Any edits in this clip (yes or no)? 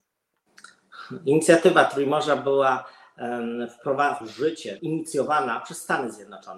yes